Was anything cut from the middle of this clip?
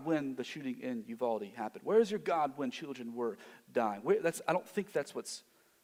no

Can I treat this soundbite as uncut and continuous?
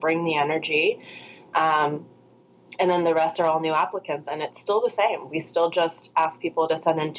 yes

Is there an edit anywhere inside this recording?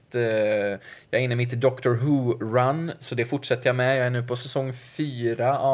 no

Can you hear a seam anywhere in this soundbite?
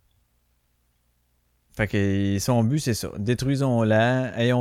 no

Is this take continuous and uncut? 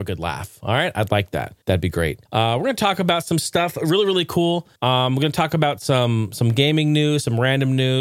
no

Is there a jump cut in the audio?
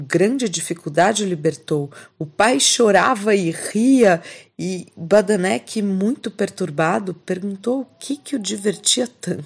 no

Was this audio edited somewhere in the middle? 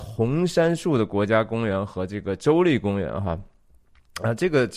no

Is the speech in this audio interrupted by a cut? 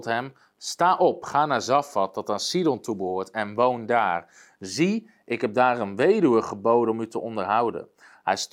no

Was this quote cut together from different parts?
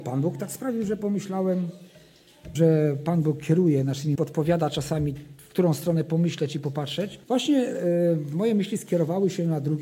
yes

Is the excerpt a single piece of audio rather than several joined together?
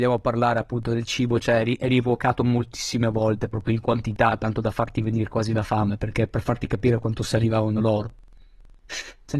yes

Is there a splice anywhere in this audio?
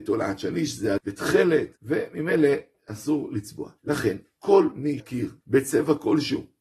yes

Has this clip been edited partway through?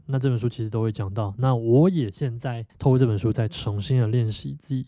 yes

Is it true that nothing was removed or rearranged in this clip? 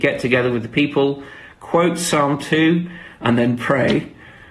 yes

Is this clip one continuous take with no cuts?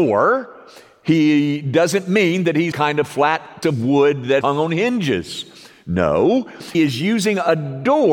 no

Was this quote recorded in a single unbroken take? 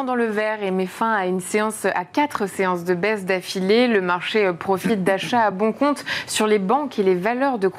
yes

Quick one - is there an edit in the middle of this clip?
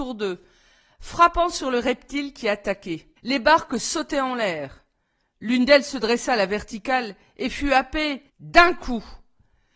yes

